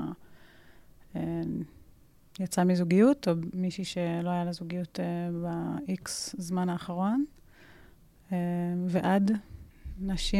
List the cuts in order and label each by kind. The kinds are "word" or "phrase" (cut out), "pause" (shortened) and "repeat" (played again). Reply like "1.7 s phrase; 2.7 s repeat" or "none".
none